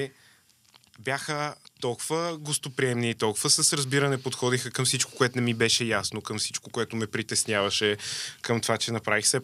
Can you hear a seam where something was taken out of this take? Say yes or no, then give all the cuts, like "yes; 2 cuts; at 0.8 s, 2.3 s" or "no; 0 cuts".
no; 0 cuts